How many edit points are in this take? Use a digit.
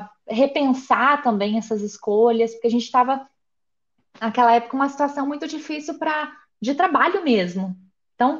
0